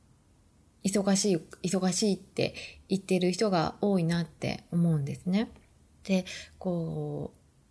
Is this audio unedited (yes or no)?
no